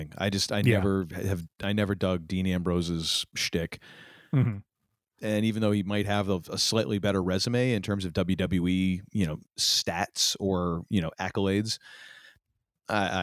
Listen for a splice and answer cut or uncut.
uncut